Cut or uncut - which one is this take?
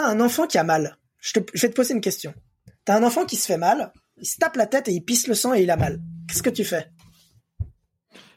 uncut